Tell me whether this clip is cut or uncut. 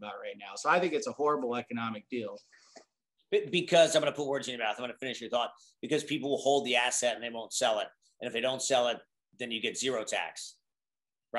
uncut